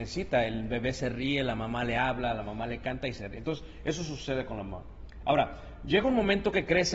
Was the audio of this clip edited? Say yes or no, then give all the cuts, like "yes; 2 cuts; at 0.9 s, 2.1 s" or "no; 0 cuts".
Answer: no; 0 cuts